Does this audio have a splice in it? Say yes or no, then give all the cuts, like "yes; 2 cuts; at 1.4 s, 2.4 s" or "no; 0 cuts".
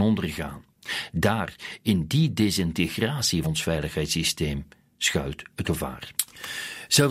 yes; 2 cuts; at 3.4 s, 5.6 s